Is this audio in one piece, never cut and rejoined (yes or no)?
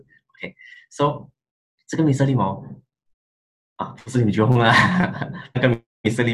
yes